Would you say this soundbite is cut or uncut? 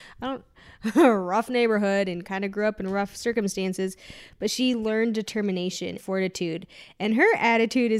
cut